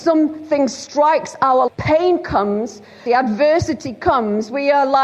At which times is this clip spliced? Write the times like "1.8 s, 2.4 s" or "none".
1.7 s, 3.1 s